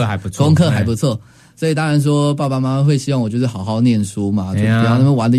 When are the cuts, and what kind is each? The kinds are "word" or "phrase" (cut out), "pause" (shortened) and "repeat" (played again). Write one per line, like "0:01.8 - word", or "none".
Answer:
none